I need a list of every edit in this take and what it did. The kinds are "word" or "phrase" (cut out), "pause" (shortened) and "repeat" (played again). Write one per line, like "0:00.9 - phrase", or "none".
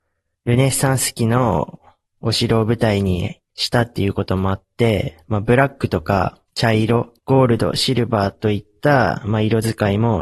0:02.1 - pause
0:03.5 - pause
0:06.5 - pause
0:07.2 - pause